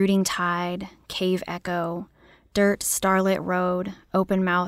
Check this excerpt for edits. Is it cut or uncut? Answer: uncut